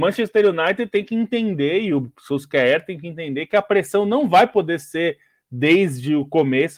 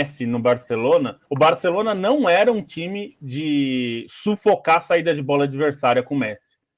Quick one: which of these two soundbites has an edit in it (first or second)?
second